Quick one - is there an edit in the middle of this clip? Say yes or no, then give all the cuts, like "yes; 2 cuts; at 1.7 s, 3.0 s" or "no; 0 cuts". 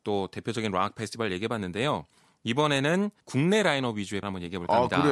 yes; 2 cuts; at 3.2 s, 4.2 s